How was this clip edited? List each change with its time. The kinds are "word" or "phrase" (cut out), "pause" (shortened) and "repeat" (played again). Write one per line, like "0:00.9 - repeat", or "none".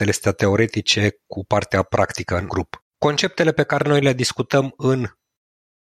0:02.9 - pause